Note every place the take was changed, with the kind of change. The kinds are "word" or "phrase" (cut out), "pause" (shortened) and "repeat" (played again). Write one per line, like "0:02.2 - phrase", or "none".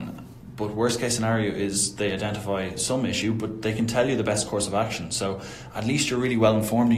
none